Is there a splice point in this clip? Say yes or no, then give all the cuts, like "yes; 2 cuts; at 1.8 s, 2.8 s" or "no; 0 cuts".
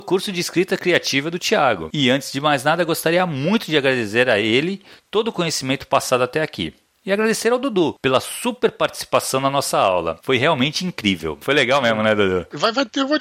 no; 0 cuts